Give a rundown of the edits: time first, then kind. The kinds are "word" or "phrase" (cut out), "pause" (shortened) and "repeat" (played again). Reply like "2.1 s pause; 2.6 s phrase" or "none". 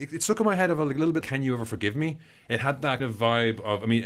1.2 s word; 3.0 s word